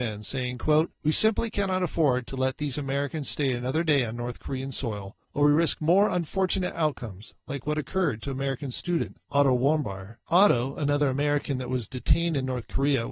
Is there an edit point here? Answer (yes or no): yes